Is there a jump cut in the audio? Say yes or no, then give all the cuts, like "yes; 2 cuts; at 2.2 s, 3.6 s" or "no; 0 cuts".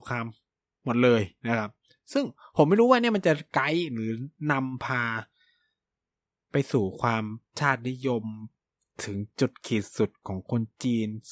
yes; 1 cut; at 7.5 s